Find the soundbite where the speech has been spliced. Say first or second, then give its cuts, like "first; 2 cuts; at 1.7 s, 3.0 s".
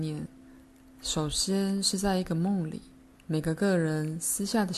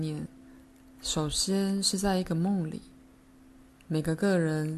first; 1 cut; at 3.1 s